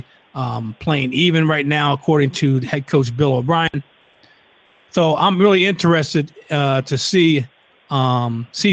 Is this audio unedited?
yes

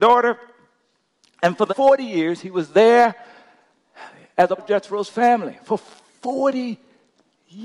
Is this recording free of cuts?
no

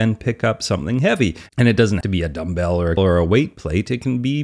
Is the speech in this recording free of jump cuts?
no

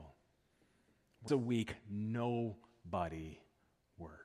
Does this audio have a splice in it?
yes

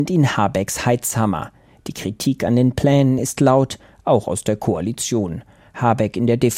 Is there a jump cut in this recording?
no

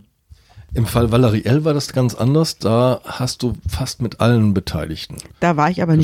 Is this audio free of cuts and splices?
yes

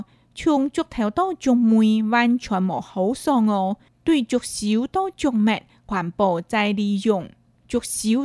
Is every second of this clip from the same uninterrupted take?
yes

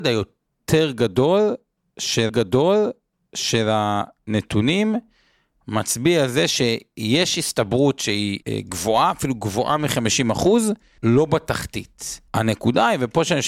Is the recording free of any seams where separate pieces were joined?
no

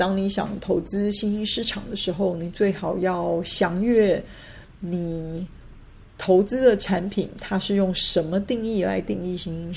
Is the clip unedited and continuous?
yes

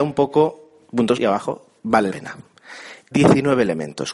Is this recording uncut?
no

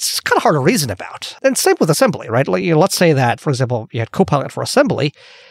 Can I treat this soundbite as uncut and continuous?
yes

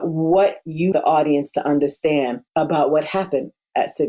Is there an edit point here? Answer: yes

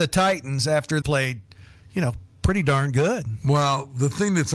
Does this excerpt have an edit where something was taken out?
yes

